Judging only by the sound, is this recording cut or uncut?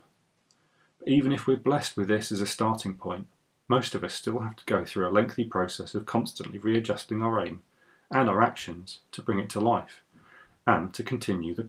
uncut